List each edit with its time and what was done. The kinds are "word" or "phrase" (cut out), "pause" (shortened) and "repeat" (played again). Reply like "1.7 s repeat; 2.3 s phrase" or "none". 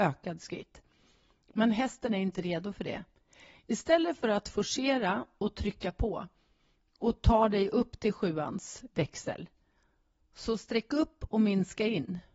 none